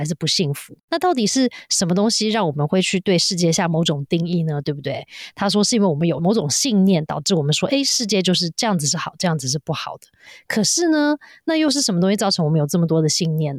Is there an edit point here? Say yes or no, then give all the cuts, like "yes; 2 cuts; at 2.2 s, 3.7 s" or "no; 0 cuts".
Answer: no; 0 cuts